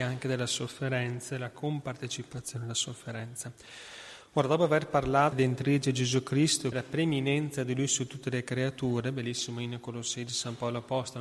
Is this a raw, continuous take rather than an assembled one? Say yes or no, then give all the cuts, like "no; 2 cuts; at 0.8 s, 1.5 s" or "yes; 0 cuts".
no; 2 cuts; at 5.3 s, 6.7 s